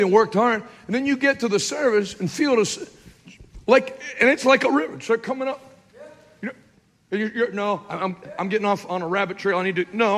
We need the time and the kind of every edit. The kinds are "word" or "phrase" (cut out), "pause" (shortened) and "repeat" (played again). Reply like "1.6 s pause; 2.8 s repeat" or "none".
6.7 s pause